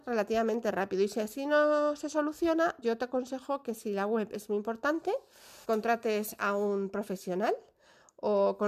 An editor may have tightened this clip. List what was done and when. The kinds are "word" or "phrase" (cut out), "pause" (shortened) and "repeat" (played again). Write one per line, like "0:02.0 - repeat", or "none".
0:02.8 - word
0:05.6 - word